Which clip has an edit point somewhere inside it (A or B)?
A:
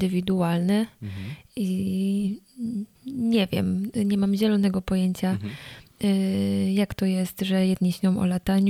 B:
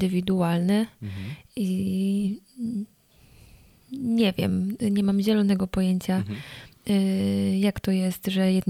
A